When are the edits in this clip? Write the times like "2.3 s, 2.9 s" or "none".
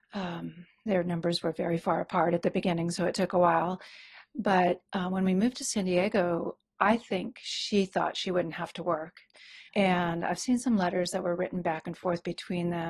6.7 s, 9.7 s